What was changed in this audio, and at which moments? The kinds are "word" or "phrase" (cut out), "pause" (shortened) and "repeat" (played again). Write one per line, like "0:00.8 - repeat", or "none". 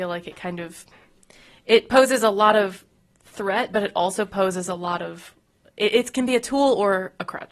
none